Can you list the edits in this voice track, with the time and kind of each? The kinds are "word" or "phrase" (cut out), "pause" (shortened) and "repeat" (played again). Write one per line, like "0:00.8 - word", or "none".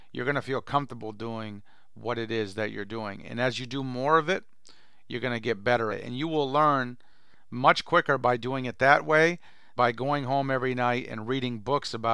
0:05.9 - word
0:09.8 - word